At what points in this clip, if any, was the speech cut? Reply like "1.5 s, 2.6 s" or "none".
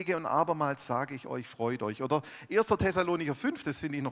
none